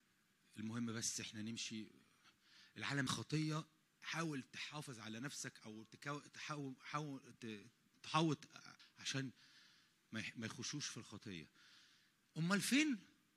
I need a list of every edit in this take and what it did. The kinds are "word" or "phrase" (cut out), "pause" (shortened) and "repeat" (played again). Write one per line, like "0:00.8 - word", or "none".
0:03.1 - word
0:08.8 - word